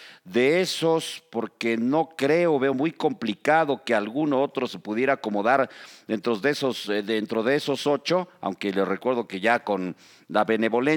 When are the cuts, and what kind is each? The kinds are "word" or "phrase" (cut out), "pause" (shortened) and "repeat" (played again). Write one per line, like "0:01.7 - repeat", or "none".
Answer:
none